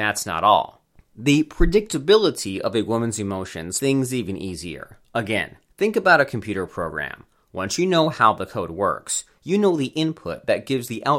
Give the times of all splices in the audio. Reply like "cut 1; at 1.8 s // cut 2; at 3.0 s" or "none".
cut 1; at 3.8 s // cut 2; at 5.0 s